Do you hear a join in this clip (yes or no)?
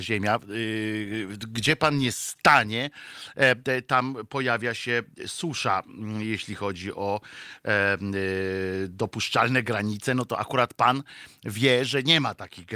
no